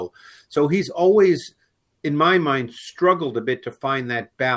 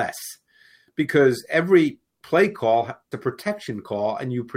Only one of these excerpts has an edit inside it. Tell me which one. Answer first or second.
second